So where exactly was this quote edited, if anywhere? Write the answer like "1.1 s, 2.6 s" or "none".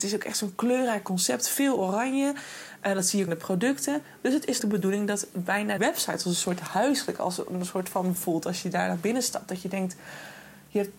3.3 s, 4.6 s, 5.8 s, 8.2 s